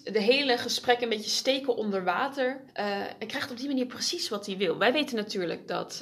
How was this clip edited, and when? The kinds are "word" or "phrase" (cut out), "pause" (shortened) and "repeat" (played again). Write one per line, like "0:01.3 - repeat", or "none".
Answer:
0:02.7 - pause